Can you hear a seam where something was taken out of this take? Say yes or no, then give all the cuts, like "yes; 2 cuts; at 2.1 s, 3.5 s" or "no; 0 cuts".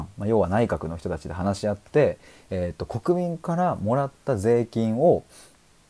no; 0 cuts